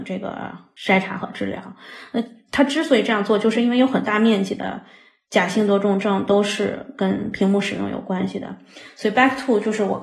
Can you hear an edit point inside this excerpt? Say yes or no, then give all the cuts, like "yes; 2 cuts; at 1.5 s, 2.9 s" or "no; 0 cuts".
no; 0 cuts